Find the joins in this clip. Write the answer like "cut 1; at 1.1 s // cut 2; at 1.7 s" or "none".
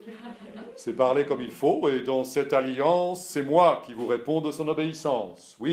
none